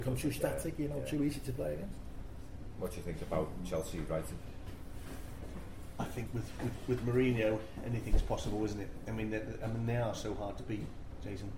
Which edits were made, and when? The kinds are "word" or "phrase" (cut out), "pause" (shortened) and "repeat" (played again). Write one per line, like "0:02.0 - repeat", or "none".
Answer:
none